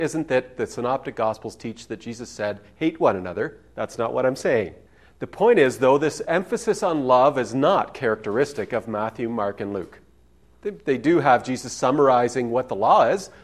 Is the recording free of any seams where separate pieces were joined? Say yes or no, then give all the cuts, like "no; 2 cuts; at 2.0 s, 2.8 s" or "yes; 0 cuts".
yes; 0 cuts